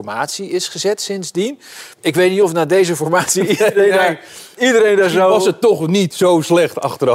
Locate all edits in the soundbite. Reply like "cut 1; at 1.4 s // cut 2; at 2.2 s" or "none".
cut 1; at 1.9 s